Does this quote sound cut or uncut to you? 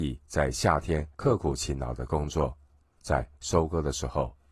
cut